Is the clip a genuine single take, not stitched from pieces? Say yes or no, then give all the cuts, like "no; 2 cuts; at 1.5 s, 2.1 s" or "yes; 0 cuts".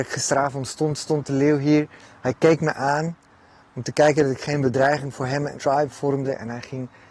no; 1 cut; at 5.6 s